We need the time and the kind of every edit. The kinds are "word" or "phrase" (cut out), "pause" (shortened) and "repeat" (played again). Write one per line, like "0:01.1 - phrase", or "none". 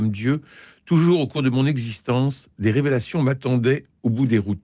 none